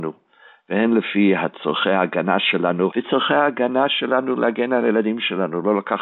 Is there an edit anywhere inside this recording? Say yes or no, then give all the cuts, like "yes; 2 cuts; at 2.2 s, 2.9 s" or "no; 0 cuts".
yes; 1 cut; at 2.9 s